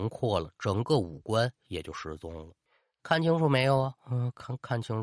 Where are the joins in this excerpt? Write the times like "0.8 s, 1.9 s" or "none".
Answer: 1.6 s, 2.7 s, 4.0 s